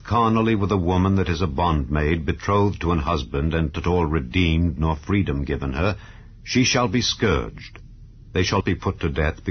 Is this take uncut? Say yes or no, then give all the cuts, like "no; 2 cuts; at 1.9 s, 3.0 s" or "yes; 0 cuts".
no; 2 cuts; at 3.7 s, 8.6 s